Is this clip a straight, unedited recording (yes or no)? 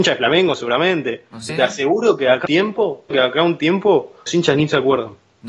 no